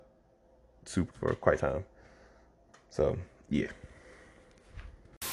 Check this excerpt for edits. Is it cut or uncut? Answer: cut